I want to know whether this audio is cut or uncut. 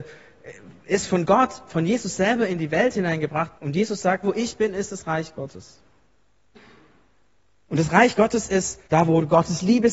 cut